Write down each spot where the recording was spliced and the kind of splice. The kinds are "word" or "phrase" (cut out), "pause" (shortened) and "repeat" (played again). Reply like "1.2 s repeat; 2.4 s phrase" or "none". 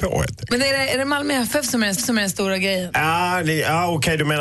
2.0 s repeat